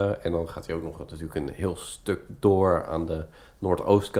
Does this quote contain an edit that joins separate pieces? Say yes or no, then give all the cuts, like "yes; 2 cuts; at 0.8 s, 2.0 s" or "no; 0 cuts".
no; 0 cuts